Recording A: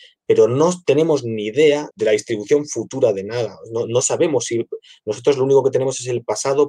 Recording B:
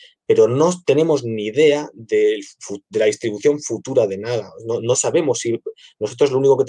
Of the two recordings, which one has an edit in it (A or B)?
A